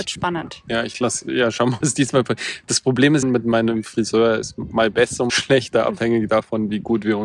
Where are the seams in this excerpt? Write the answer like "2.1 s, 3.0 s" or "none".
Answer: 1.8 s, 3.2 s, 5.3 s